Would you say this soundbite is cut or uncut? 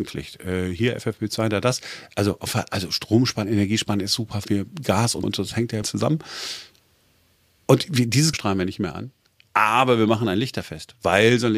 cut